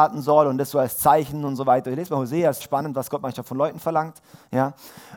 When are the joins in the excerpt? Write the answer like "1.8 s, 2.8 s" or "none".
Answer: 2.6 s